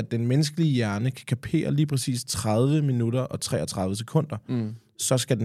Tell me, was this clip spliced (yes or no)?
no